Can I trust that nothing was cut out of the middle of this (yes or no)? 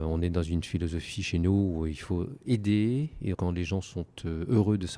no